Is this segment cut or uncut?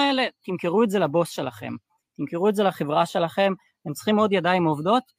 uncut